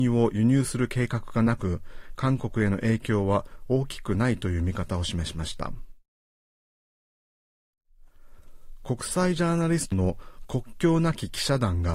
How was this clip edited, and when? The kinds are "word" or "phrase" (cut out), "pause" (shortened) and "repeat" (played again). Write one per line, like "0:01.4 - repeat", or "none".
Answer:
0:09.9 - word

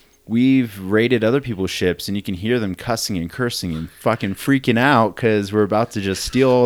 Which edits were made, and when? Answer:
none

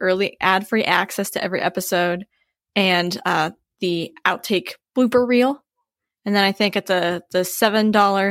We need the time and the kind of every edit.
none

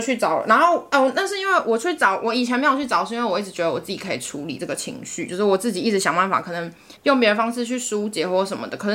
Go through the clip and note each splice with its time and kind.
0:07.0 - pause

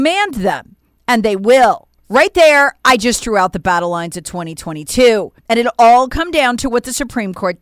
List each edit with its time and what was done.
0:02.0 - pause
0:05.4 - pause

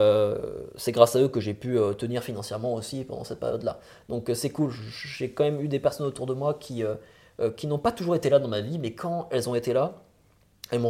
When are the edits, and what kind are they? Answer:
none

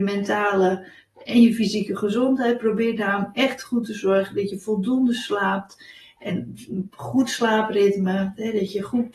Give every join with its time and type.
none

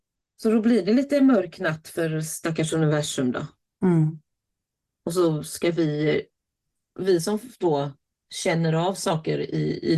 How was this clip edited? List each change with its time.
none

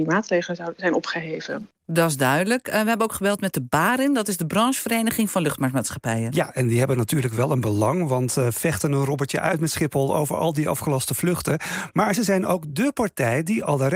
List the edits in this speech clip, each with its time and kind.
none

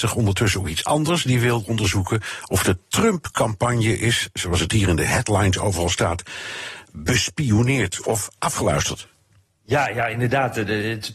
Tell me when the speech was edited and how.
none

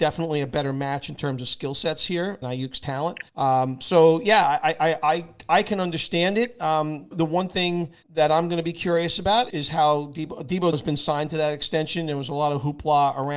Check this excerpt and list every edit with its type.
0:02.4 - phrase
0:03.3 - pause
0:07.1 - word
0:08.0 - pause
0:09.5 - word
0:10.7 - word

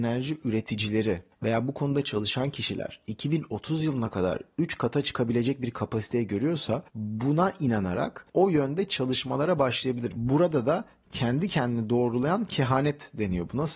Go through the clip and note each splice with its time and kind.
0:06.9 - pause
0:08.3 - pause

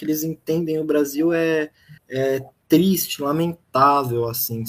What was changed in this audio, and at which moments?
0:02.0 - pause

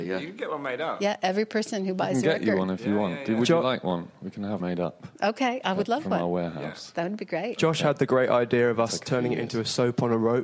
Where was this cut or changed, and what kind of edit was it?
0:04.6 - word
0:05.1 - pause

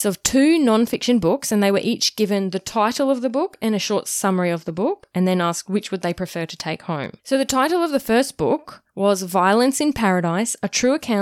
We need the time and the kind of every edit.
0:07.2 - pause
0:08.9 - pause

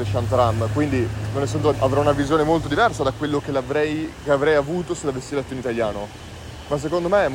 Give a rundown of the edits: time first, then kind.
0:01.7 - phrase

